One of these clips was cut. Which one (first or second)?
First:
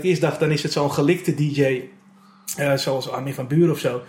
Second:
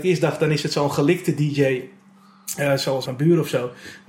second